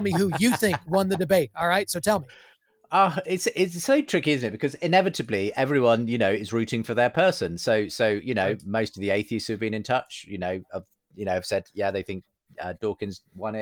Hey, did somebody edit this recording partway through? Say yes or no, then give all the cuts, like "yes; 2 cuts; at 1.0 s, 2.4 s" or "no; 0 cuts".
no; 0 cuts